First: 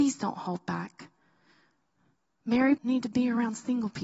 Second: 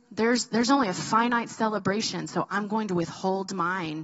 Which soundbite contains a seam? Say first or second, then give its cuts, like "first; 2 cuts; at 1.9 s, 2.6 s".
first; 1 cut; at 2.8 s